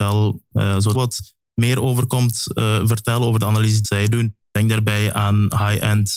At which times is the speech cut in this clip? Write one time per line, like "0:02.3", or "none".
0:00.9
0:03.8
0:04.4